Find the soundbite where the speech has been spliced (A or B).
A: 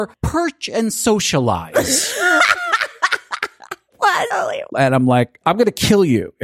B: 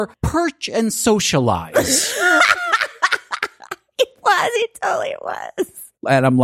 A